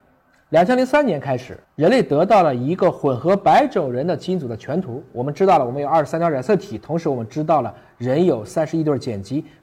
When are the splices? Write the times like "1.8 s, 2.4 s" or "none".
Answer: 1.6 s